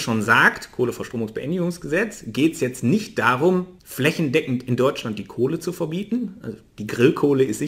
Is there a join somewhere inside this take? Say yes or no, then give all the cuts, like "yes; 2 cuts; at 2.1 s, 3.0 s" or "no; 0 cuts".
yes; 1 cut; at 3.8 s